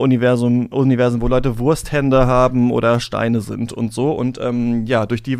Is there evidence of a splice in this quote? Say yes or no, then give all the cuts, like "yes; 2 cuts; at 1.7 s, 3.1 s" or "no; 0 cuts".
no; 0 cuts